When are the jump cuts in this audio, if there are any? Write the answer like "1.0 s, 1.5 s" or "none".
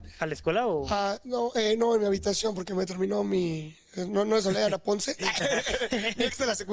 none